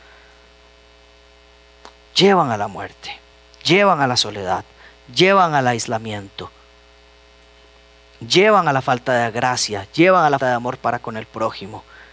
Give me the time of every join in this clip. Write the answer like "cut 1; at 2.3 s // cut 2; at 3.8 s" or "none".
cut 1; at 2.1 s // cut 2; at 3.3 s // cut 3; at 10.4 s